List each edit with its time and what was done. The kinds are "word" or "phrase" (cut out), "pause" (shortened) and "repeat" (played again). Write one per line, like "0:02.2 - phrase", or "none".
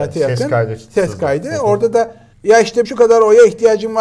0:02.3 - pause
0:02.8 - word